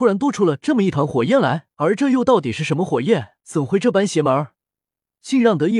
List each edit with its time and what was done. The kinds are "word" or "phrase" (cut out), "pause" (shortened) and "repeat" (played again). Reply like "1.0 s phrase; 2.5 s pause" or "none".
1.7 s pause; 3.4 s pause

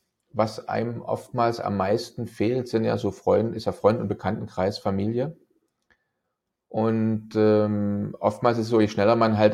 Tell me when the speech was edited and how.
none

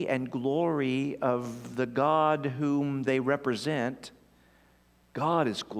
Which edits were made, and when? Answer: none

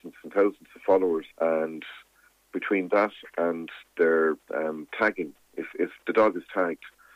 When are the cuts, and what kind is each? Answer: 1.3 s pause; 4.4 s pause

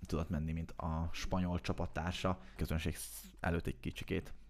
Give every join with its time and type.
2.6 s phrase

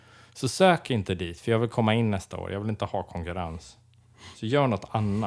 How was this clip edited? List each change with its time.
none

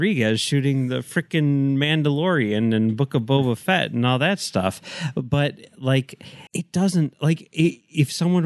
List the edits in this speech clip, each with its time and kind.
6.5 s pause

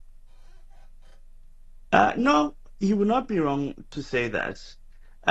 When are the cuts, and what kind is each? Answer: none

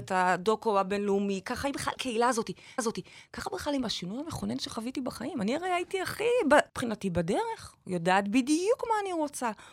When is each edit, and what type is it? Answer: 1.9 s word; 2.8 s repeat; 6.7 s pause

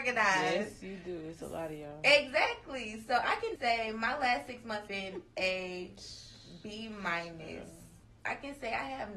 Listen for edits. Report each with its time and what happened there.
3.6 s word; 4.9 s word

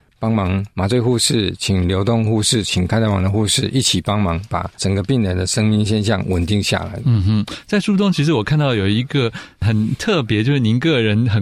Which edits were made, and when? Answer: 4.7 s pause

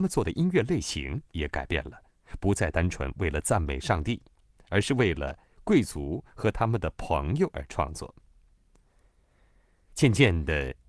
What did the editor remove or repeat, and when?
none

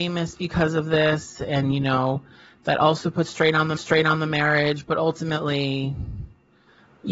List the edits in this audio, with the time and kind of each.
3.8 s repeat

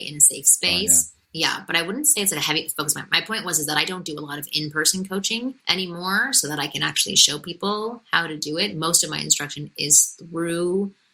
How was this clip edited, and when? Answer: 1.2 s pause; 5.6 s pause

